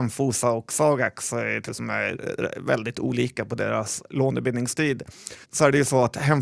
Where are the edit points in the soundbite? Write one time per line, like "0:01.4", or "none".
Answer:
0:01.7
0:05.4

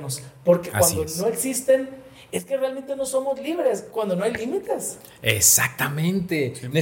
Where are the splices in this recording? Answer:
none

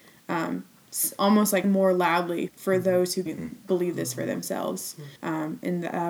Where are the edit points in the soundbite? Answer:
0:01.6
0:02.5
0:03.3
0:05.2

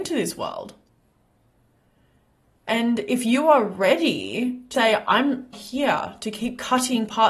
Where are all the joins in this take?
0:04.7
0:05.5

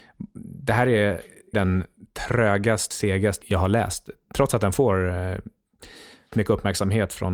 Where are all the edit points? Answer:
0:01.5
0:02.9
0:03.4
0:06.3

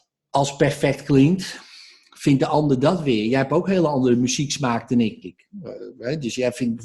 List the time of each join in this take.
0:05.2

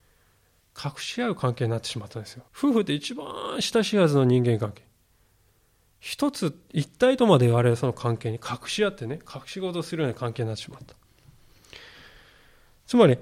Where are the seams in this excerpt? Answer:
0:02.5

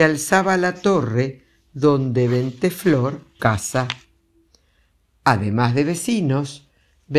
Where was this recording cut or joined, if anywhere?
0:03.4

